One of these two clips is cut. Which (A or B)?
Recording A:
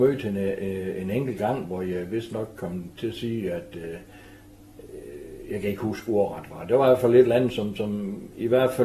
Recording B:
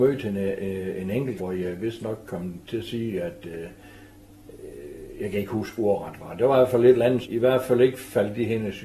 B